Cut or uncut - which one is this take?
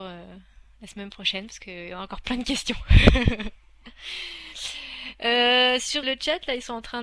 cut